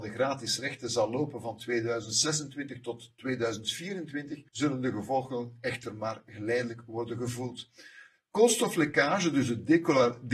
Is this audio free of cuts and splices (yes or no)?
no